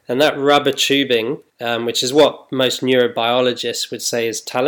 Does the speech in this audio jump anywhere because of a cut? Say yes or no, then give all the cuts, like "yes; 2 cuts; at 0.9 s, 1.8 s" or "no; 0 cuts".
yes; 1 cut; at 1.5 s